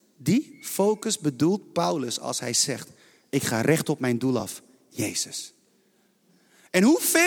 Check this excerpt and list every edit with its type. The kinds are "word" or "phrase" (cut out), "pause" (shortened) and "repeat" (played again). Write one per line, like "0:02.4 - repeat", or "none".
none